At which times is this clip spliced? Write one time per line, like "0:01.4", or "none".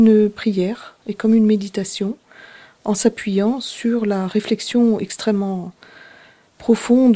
none